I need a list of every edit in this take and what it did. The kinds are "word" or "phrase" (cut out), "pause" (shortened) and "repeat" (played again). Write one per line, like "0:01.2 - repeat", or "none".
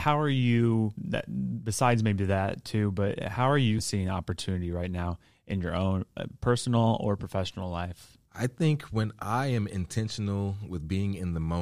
0:08.3 - pause